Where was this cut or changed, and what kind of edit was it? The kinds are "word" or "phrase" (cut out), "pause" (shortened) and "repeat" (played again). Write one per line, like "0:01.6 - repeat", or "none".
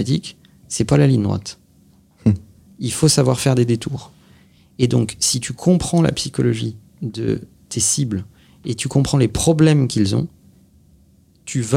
none

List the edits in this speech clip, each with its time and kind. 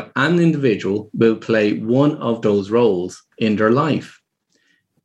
0:03.3 - pause

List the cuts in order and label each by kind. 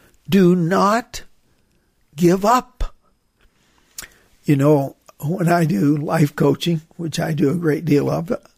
none

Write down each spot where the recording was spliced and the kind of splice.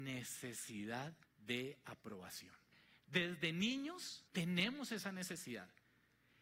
0:01.2 - pause
0:02.7 - pause
0:04.3 - pause

